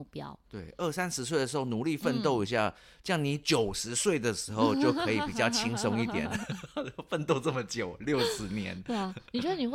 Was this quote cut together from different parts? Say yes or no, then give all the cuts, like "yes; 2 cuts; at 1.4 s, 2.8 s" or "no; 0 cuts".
no; 0 cuts